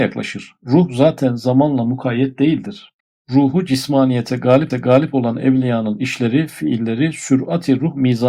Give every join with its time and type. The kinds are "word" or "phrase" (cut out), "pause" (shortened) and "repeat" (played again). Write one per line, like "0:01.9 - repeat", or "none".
0:03.0 - pause
0:04.7 - repeat